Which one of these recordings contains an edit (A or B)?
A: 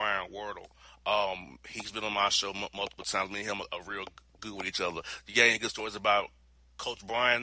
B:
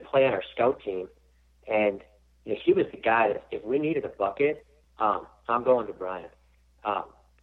A